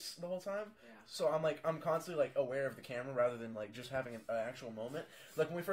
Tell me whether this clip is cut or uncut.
uncut